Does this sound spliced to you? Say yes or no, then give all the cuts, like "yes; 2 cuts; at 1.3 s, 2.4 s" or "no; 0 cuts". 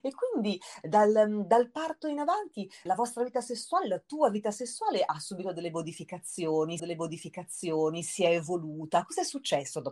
yes; 2 cuts; at 2.9 s, 6.8 s